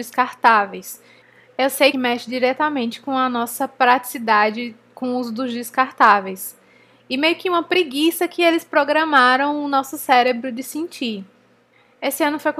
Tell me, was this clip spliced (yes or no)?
yes